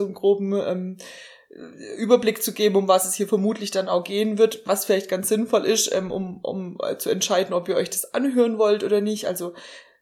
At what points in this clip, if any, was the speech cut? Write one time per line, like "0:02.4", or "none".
none